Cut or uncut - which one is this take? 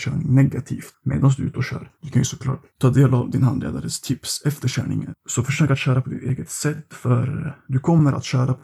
cut